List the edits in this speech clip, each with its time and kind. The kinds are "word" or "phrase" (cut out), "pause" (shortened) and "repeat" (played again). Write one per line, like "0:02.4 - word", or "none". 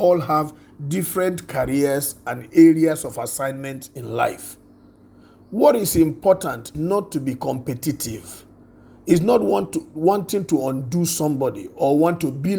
0:06.7 - word

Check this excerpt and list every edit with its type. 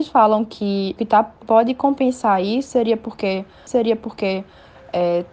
0:01.0 - word
0:01.4 - word
0:03.7 - repeat

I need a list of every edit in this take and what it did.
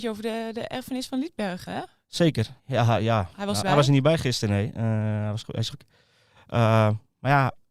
0:01.7 - word
0:02.6 - pause
0:03.6 - word
0:05.7 - phrase

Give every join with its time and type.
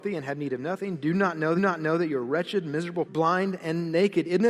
0:01.6 - repeat
0:03.1 - word

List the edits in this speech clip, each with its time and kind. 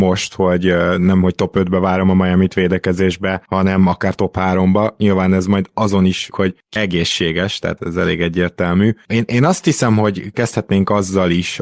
0:06.3 - word
0:06.8 - word
0:07.8 - word
0:10.3 - word

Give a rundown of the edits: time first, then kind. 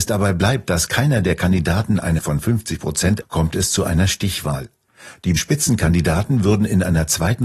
0:02.2 - word
0:03.2 - word
0:05.4 - word

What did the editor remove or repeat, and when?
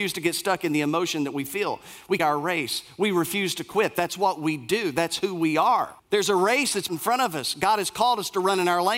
0:02.2 - phrase
0:06.0 - pause
0:06.9 - phrase

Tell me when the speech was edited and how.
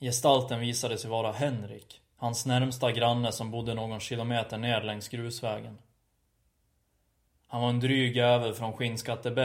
none

